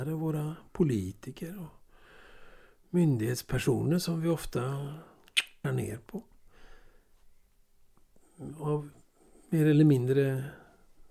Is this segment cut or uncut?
cut